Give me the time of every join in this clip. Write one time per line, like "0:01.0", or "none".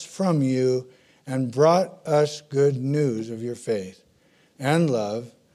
none